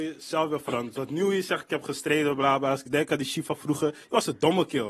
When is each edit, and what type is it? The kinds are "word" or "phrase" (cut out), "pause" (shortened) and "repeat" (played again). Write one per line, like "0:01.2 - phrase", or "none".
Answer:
none